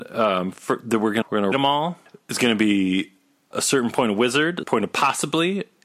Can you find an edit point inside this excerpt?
yes; 4 cuts; at 1.2 s, 1.5 s, 3.5 s, 4.6 s

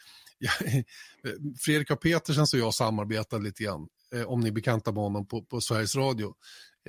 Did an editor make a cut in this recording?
no; 0 cuts

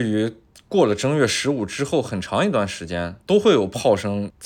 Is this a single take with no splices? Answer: no; 1 cut; at 3.2 s

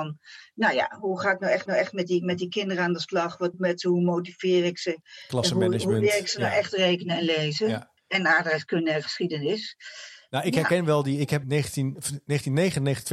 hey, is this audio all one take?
no; 4 cuts; at 1.7 s, 3.5 s, 8.0 s, 11.4 s

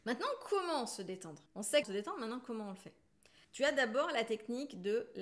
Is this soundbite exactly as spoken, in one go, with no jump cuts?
no; 3 cuts; at 1.5 s, 1.8 s, 3.4 s

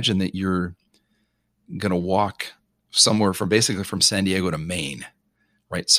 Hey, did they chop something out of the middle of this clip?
no; 0 cuts

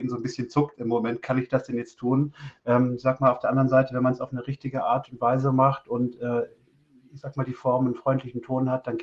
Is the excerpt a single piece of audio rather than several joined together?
yes; 0 cuts

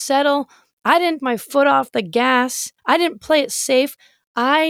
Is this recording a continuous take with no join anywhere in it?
no; 2 cuts; at 1.2 s, 2.8 s

